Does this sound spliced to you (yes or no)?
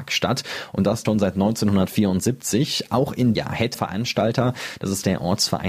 yes